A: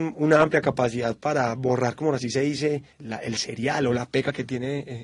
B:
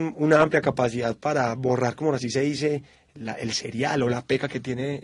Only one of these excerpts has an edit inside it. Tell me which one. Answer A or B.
A